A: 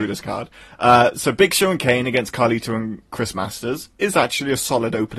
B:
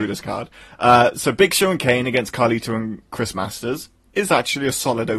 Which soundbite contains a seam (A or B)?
A